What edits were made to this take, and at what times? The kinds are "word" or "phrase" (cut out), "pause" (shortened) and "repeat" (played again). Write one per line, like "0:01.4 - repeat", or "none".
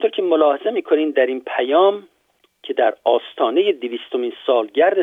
none